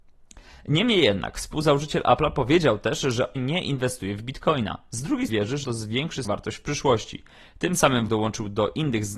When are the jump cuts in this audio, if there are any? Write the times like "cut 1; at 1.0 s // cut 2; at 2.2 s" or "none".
cut 1; at 3.4 s // cut 2; at 5.3 s // cut 3; at 5.6 s // cut 4; at 6.3 s // cut 5; at 8.1 s